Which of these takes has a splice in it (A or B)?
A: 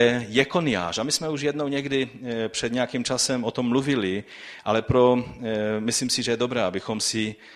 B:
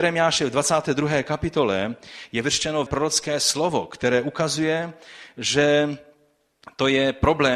B